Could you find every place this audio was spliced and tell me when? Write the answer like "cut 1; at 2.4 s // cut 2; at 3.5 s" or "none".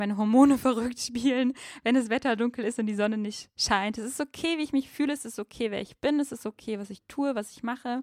none